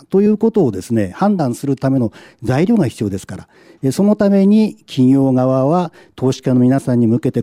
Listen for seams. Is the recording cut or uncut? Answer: uncut